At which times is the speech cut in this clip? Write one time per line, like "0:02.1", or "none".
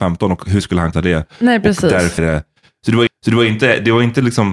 0:00.9
0:02.2
0:03.1